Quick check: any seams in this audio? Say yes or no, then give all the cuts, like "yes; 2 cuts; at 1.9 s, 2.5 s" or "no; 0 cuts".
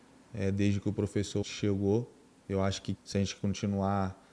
yes; 2 cuts; at 1.4 s, 3.0 s